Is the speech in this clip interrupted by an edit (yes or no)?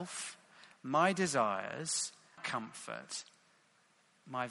yes